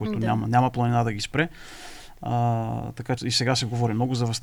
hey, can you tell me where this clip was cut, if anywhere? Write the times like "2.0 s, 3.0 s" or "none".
3.2 s